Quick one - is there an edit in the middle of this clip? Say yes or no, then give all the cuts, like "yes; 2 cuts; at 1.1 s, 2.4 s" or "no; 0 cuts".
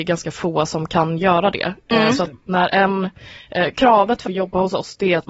yes; 1 cut; at 4.3 s